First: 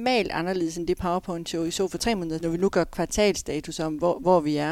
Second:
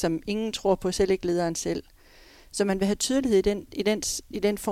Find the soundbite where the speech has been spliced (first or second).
first